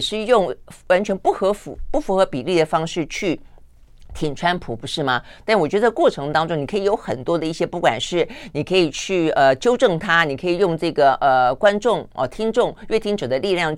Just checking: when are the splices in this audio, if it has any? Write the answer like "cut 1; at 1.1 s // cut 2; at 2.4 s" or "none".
none